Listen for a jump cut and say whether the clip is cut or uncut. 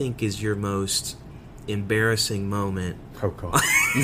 uncut